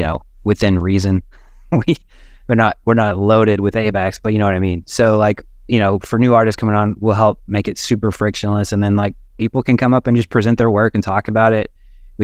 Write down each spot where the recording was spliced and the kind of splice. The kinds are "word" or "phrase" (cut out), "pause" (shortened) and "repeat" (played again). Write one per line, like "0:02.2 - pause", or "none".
none